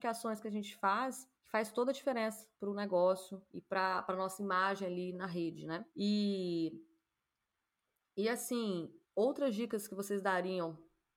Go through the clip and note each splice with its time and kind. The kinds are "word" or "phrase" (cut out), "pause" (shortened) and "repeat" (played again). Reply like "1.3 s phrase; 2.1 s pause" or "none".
1.3 s pause; 2.5 s pause; 3.5 s pause; 5.9 s pause; 9.0 s pause